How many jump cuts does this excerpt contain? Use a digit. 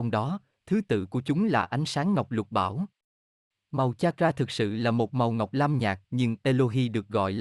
1